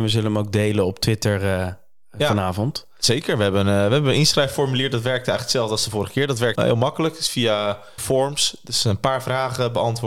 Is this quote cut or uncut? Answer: cut